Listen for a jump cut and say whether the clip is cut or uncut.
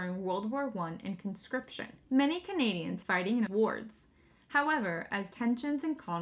cut